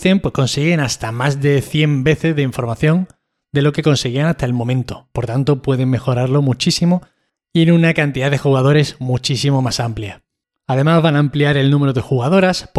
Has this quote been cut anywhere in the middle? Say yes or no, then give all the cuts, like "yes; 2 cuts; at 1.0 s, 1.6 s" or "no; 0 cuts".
no; 0 cuts